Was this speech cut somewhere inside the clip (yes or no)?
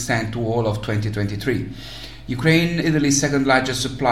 yes